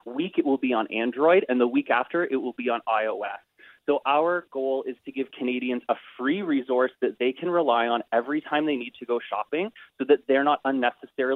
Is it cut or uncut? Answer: uncut